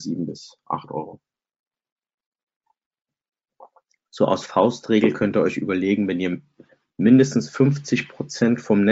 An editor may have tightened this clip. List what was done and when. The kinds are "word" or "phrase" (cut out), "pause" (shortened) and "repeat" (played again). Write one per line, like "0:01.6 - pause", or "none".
none